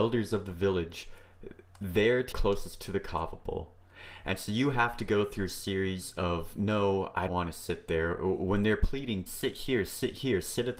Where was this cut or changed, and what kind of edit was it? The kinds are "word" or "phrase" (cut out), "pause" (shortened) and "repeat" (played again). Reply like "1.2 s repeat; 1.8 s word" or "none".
2.3 s word; 7.3 s word; 9.3 s word